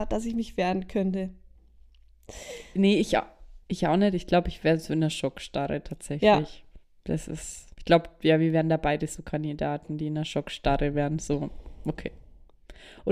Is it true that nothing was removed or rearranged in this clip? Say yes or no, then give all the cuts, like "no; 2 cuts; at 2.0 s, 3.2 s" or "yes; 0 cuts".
no; 3 cuts; at 3.6 s, 6.8 s, 7.7 s